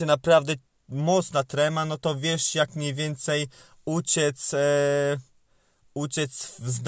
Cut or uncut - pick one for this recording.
uncut